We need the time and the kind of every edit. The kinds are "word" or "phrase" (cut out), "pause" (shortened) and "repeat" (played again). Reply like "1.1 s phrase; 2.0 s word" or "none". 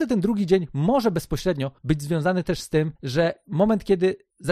1.8 s pause; 3.0 s pause

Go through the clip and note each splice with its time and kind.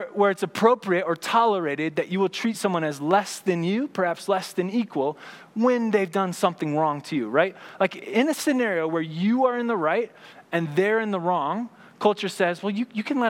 none

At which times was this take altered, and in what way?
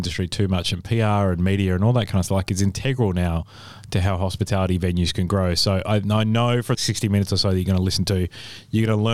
2.3 s word; 6.7 s phrase

